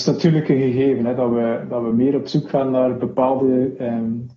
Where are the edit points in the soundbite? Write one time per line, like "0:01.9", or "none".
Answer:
none